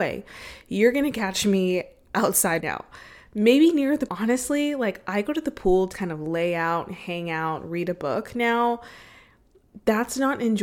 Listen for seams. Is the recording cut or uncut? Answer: cut